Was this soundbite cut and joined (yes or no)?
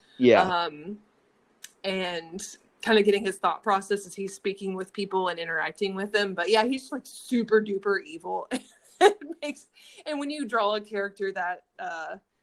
yes